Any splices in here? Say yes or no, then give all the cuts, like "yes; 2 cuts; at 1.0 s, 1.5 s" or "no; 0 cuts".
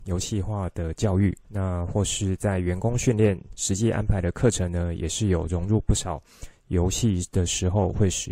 yes; 1 cut; at 1.4 s